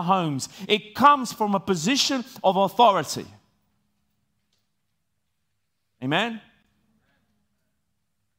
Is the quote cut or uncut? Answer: uncut